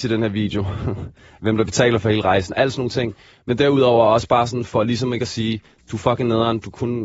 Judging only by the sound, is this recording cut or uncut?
uncut